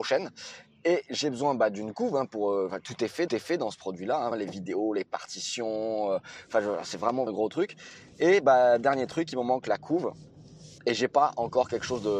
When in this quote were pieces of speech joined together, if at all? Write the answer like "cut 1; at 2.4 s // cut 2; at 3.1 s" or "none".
cut 1; at 3.3 s // cut 2; at 4.3 s // cut 3; at 7.3 s // cut 4; at 10.8 s